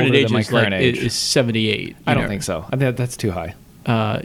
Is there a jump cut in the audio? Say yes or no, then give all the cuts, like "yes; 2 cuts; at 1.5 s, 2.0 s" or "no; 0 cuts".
no; 0 cuts